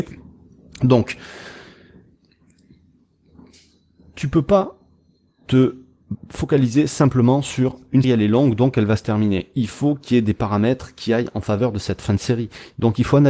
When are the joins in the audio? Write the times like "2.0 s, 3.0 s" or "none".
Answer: 8.0 s